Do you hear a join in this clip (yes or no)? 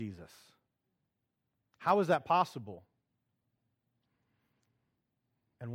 no